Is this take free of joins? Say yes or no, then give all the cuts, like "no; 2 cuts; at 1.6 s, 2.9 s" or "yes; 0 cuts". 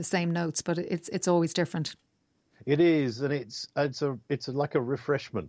yes; 0 cuts